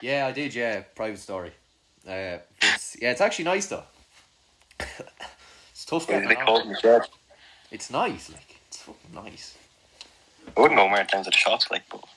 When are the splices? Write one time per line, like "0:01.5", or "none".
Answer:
none